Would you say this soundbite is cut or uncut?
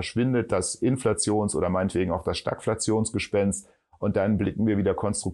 uncut